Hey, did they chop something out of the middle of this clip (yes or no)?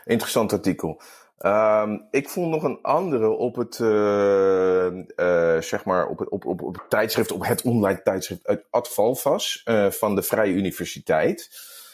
no